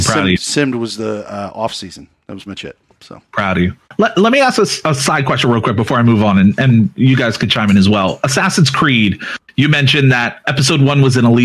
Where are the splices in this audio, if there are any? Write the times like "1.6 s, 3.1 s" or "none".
2.5 s, 3.8 s, 10.4 s